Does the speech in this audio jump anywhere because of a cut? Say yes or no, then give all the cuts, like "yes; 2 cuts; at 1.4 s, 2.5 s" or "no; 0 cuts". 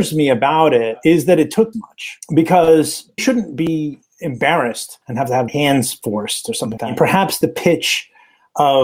yes; 5 cuts; at 1.7 s, 3.2 s, 5.0 s, 5.5 s, 6.8 s